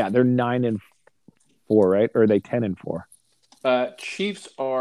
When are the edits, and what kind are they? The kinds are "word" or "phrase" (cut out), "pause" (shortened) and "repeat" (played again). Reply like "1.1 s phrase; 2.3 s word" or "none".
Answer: none